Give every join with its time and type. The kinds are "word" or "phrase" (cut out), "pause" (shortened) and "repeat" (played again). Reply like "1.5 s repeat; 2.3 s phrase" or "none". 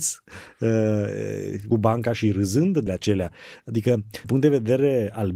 1.7 s phrase; 2.9 s word; 4.2 s word